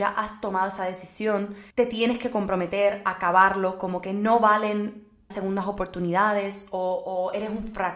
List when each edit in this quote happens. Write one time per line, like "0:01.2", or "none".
0:01.7
0:05.3